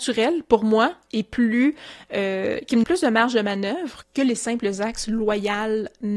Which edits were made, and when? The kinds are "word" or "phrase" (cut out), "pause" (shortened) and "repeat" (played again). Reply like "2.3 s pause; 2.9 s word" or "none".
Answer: 2.8 s word